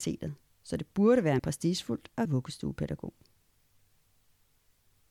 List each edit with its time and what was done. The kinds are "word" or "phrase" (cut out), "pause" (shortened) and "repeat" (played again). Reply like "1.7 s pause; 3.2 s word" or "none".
1.4 s word; 2.2 s word